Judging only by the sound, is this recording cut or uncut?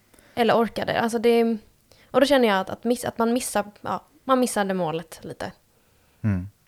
uncut